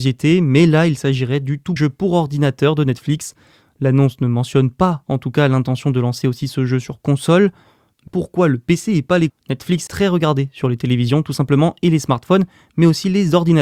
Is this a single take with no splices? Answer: no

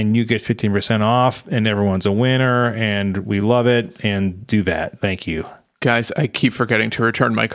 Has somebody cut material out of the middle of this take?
no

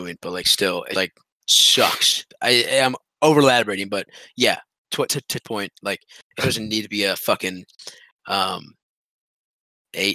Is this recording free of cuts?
no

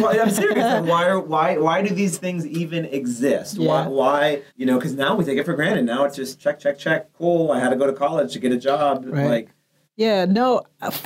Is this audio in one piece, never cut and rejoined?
no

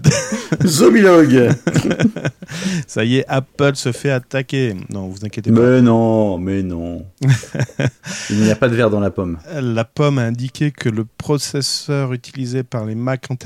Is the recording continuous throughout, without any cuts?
yes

